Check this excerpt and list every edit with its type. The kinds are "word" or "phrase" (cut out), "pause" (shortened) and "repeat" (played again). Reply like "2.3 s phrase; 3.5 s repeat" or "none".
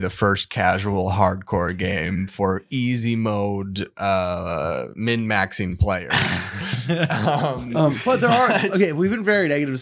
none